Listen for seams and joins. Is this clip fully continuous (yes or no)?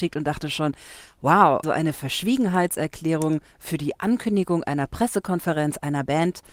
no